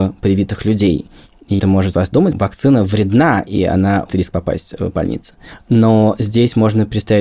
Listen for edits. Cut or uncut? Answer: cut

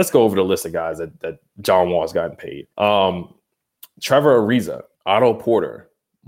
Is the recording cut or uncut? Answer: cut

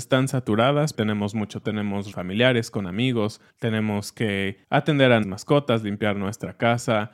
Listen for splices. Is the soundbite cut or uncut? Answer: cut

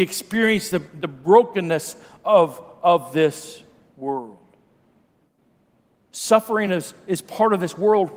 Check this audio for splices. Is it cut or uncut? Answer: uncut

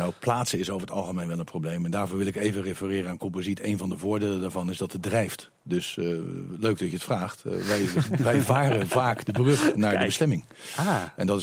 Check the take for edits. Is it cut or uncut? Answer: uncut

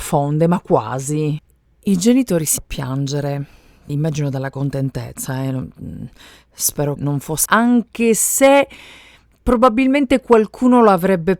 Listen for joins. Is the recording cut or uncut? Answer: cut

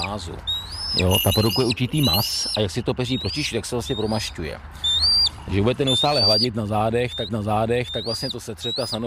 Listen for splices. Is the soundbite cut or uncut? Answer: cut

